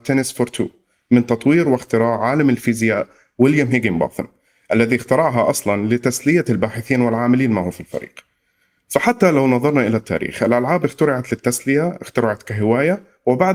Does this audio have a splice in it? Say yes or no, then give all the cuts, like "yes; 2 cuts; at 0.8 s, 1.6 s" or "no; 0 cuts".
no; 0 cuts